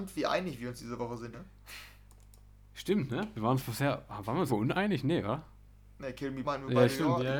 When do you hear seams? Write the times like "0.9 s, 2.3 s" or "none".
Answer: 1.3 s, 4.5 s, 6.4 s